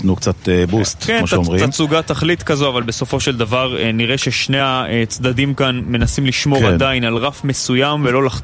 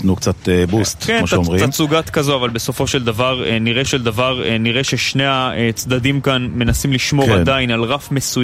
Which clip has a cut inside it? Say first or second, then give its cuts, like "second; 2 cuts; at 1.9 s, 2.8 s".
second; 2 cuts; at 2.0 s, 3.8 s